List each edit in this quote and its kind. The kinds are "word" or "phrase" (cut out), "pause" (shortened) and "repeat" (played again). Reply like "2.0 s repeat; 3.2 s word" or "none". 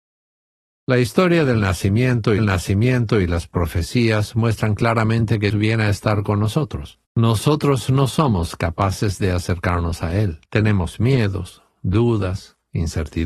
2.4 s repeat; 5.5 s word; 7.0 s pause; 10.5 s pause

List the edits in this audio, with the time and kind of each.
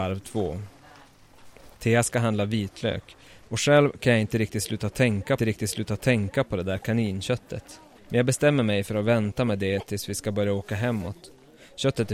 1.7 s pause; 5.4 s repeat; 8.0 s pause

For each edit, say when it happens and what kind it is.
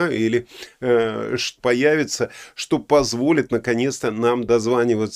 1.6 s phrase

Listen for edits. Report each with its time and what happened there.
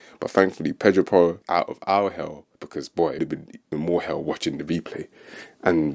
1.4 s phrase; 2.5 s pause; 3.2 s word; 3.7 s word

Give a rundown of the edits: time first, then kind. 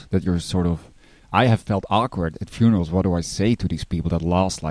none

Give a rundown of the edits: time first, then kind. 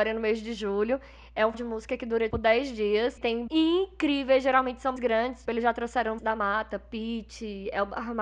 1.5 s word; 2.3 s word; 3.2 s word; 3.5 s word; 5.0 s word; 5.4 s word; 6.2 s word

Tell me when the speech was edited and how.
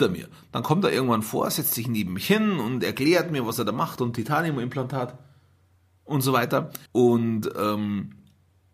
5.8 s pause; 6.9 s pause

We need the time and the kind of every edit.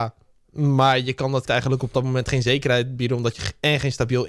1.5 s word

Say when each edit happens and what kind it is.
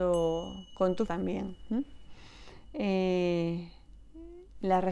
1.1 s word

